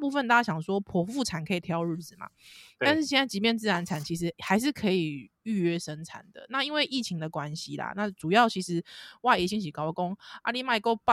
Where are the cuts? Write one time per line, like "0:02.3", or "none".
none